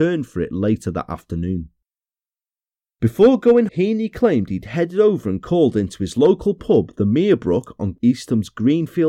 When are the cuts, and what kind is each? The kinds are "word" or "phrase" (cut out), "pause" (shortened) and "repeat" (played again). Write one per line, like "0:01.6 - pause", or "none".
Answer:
0:03.7 - word